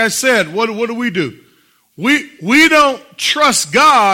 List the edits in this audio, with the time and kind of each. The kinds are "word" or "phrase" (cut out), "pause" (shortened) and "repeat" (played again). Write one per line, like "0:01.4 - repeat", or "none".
none